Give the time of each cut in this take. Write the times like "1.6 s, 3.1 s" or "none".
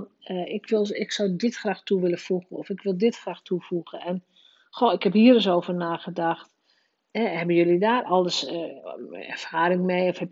none